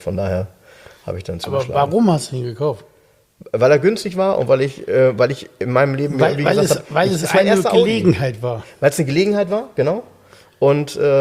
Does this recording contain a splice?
no; 0 cuts

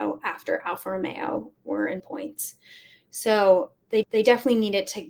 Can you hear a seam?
yes; 2 cuts; at 2.0 s, 4.0 s

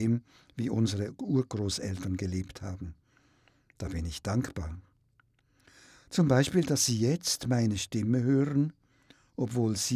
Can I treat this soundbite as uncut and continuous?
yes; 0 cuts

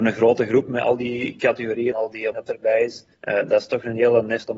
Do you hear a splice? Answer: yes; 3 cuts; at 1.9 s, 2.3 s, 3.1 s

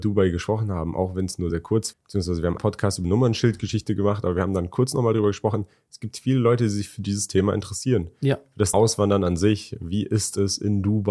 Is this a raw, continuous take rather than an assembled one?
no; 5 cuts; at 1.5 s, 1.9 s, 2.6 s, 3.0 s, 8.7 s

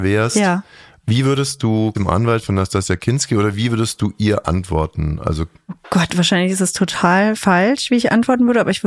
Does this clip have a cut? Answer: no; 0 cuts

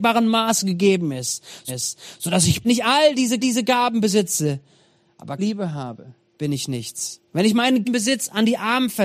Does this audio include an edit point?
yes; 7 cuts; at 1.7 s, 2.6 s, 3.4 s, 5.4 s, 6.2 s, 7.3 s, 7.8 s

